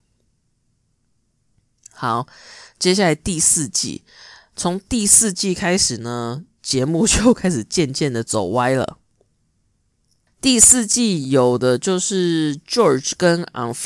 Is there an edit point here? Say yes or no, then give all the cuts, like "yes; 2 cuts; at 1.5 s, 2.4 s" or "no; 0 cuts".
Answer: no; 0 cuts